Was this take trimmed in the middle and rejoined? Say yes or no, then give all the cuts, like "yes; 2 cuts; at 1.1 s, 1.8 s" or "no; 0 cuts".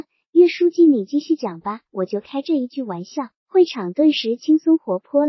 yes; 2 cuts; at 1.9 s, 3.4 s